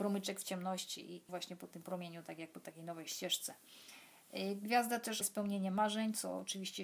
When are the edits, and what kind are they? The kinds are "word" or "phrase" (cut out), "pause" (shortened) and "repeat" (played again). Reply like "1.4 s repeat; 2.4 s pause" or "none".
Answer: 1.3 s word; 5.2 s word

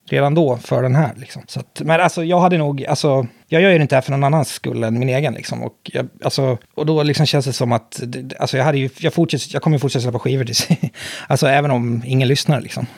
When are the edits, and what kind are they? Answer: 1.5 s pause; 3.4 s pause; 6.6 s pause

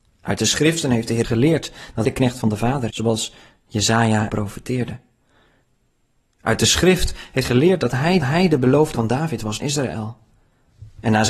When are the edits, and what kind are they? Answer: 1.2 s word; 2.0 s word; 2.9 s word; 4.3 s word; 7.4 s word; 8.2 s repeat; 8.9 s word; 9.6 s phrase

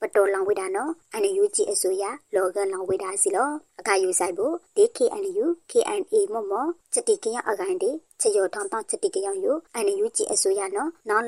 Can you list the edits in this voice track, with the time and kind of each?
none

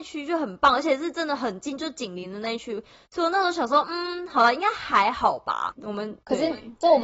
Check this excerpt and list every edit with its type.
none

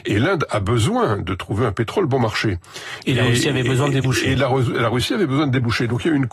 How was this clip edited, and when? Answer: none

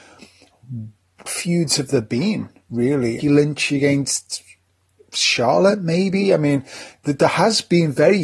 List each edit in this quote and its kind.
1.3 s word; 3.2 s phrase

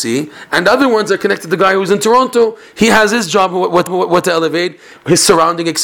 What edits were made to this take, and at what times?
3.9 s repeat

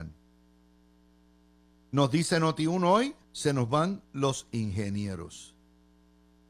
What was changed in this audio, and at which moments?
3.2 s pause; 4.0 s pause

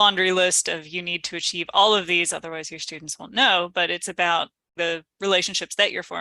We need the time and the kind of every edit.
4.8 s word

